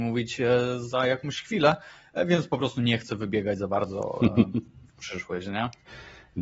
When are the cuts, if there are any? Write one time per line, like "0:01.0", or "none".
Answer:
none